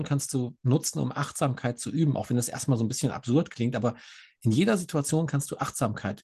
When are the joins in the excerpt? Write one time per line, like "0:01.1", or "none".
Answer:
none